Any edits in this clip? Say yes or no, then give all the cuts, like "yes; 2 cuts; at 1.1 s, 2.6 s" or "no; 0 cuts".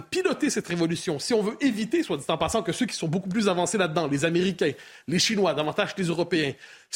no; 0 cuts